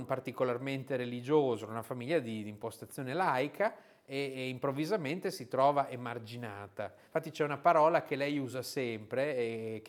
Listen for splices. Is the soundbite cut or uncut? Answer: uncut